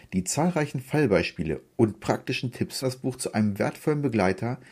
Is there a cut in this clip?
yes; 1 cut; at 2.8 s

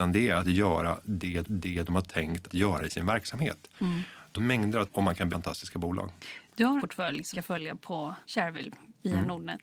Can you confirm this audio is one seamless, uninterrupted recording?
no; 8 cuts; at 1.4 s, 2.5 s, 4.3 s, 4.9 s, 5.3 s, 6.8 s, 7.3 s, 8.2 s

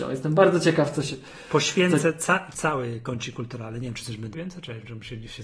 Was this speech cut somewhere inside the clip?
yes; 2 cuts; at 2.5 s, 4.3 s

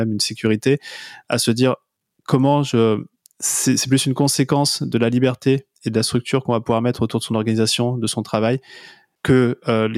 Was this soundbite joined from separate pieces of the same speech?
no; 0 cuts

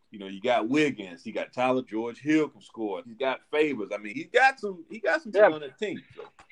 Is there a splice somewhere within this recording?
yes; 4 cuts; at 1.9 s, 3.0 s, 4.1 s, 5.3 s

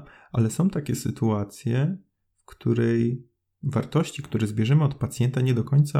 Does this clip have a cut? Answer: no; 0 cuts

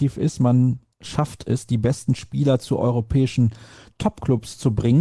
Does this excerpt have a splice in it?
no; 0 cuts

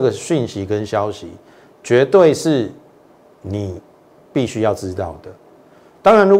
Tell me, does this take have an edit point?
no; 0 cuts

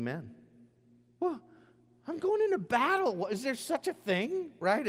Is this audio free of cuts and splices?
yes; 0 cuts

